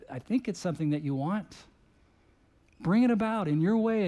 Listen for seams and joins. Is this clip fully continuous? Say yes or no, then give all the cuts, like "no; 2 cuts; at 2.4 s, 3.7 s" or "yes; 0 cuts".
yes; 0 cuts